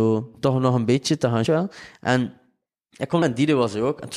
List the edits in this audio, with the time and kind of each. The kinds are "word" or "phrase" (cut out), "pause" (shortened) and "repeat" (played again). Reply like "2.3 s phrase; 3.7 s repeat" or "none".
1.5 s phrase; 3.2 s word